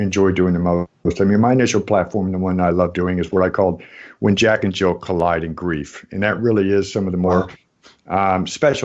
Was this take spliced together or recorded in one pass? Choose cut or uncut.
uncut